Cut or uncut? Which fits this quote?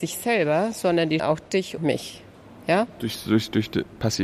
cut